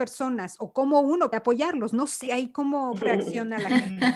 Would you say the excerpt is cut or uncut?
cut